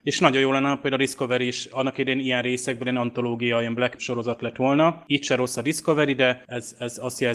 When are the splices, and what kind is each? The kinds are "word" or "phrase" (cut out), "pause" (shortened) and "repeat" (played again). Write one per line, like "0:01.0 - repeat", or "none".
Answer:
0:04.0 - phrase

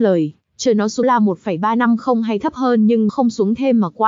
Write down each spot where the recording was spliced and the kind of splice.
0:01.0 - word
0:03.1 - word

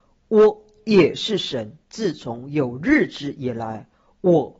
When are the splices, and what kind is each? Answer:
0:01.8 - pause

